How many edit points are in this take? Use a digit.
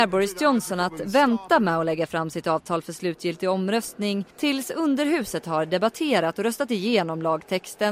1